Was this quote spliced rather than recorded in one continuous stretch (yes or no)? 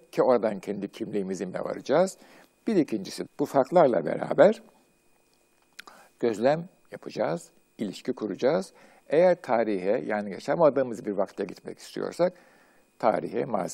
yes